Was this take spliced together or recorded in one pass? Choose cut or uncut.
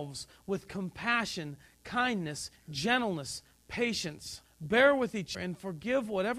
cut